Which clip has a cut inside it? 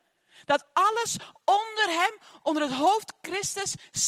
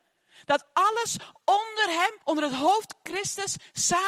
second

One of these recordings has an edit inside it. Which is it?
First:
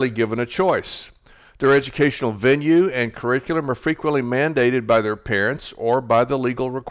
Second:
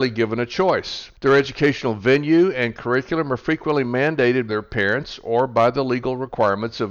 second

